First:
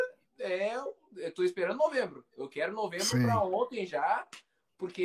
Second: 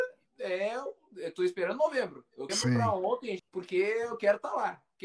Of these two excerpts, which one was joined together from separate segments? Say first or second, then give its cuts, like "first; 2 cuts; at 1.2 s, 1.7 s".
second; 2 cuts; at 2.5 s, 3.4 s